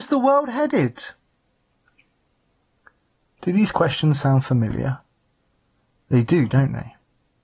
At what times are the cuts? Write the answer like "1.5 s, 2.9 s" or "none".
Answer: none